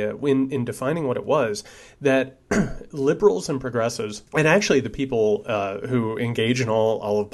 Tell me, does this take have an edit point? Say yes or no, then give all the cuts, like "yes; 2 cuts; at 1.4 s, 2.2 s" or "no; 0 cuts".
yes; 1 cut; at 4.3 s